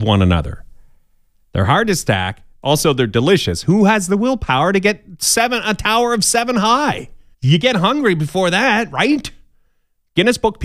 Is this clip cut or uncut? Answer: cut